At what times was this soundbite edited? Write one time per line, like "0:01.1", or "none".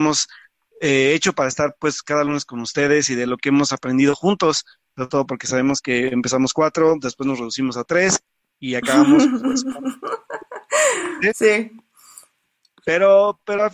none

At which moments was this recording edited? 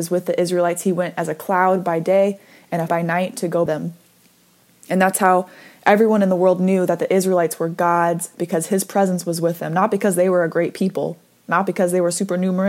0:02.9
0:03.7
0:08.3

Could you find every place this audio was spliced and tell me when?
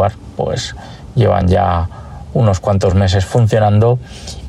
none

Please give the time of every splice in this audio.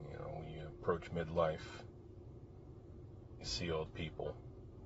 0:03.4
0:03.9

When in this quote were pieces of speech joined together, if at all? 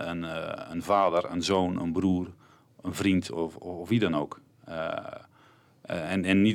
none

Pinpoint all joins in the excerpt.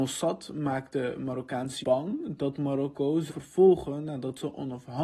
0:01.8
0:03.3

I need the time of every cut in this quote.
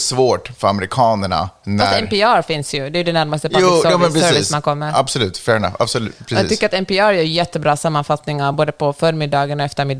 none

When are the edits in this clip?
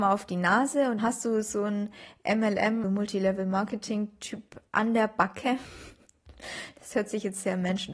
0:01.0
0:02.8
0:04.7

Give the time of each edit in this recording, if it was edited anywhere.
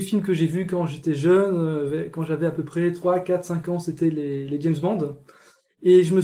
none

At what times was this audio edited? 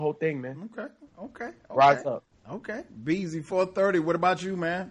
0:02.3

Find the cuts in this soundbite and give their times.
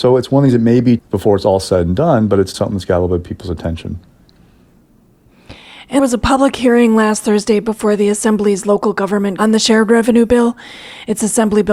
0:01.0
0:02.5
0:06.0
0:09.4

